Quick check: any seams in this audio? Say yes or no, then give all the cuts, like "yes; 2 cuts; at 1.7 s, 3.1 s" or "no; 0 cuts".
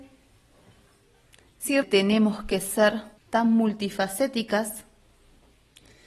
yes; 2 cuts; at 1.8 s, 3.2 s